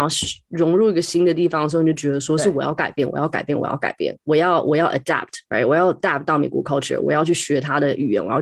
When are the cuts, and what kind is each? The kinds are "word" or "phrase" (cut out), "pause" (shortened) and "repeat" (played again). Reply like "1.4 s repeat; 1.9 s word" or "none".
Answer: none